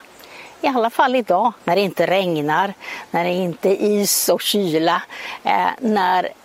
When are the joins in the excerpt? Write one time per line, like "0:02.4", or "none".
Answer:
0:01.6